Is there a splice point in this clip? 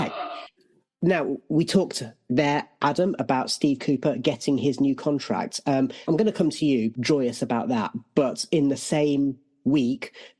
yes; 2 cuts; at 6.1 s, 6.9 s

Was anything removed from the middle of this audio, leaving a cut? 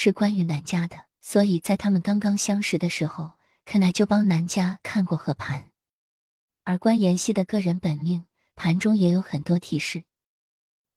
yes; 1 cut; at 1.1 s

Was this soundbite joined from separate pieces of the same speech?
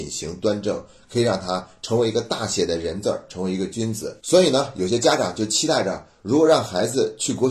yes; 1 cut; at 4.2 s

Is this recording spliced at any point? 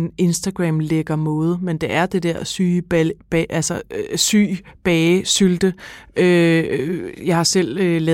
no; 0 cuts

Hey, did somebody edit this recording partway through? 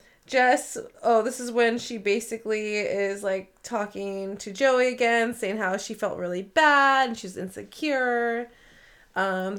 no; 0 cuts

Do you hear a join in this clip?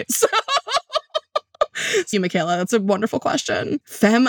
yes; 1 cut; at 2.1 s

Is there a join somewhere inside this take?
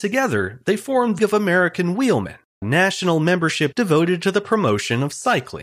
yes; 3 cuts; at 1.2 s, 2.6 s, 3.7 s

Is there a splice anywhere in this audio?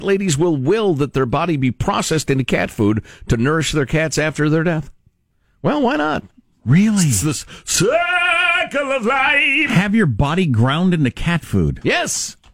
no; 0 cuts

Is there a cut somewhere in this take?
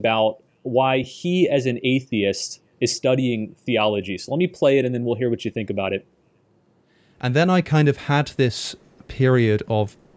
no; 0 cuts

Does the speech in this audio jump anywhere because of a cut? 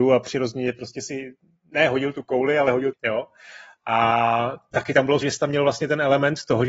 yes; 2 cuts; at 2.9 s, 5.2 s

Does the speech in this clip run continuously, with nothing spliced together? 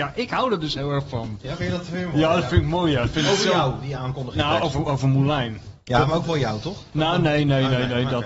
yes; 0 cuts

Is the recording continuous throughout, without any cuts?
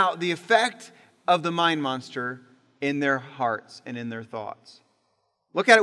yes; 0 cuts

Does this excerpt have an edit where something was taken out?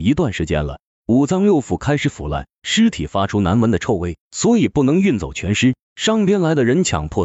yes; 2 cuts; at 4.2 s, 5.8 s

